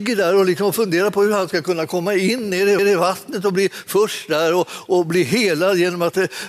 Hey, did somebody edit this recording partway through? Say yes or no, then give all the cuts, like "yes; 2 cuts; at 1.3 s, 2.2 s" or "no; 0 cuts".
yes; 1 cut; at 2.8 s